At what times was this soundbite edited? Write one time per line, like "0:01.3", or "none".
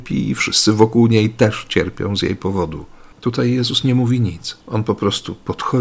0:03.1
0:04.6

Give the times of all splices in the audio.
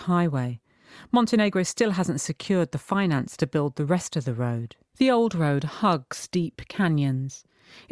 0:04.9

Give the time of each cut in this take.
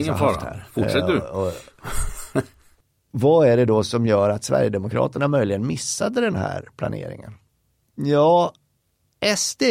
none

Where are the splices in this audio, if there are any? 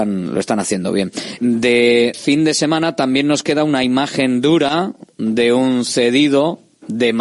0:01.4
0:02.1

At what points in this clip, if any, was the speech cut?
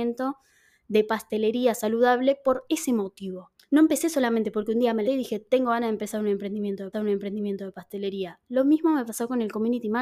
0:03.6
0:05.0
0:06.9

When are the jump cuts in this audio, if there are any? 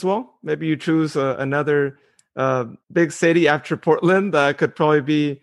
0:02.8

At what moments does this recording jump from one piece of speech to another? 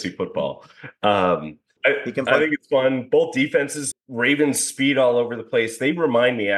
0:01.8
0:03.9

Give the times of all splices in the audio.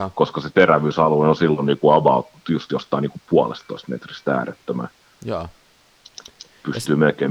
none

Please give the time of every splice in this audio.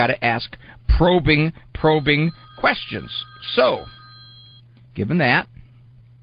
none

